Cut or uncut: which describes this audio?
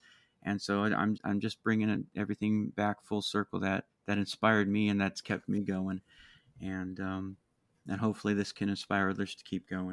cut